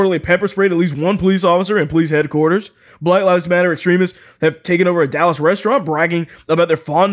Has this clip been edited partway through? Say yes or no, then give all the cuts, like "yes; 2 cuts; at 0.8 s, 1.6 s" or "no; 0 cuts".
no; 0 cuts